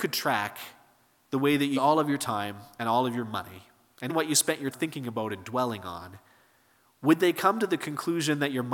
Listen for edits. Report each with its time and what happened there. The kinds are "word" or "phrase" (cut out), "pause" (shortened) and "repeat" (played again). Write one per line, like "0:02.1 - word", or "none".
0:01.7 - word
0:04.1 - word
0:04.7 - word